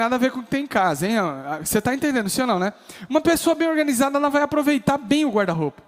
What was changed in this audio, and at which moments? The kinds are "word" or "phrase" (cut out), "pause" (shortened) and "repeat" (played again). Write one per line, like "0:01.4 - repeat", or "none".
none